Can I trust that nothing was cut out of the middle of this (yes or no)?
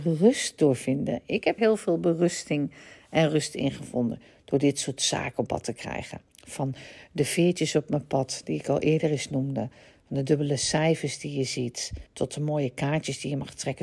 no